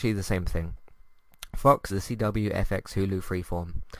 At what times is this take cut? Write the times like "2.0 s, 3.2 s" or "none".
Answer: 1.9 s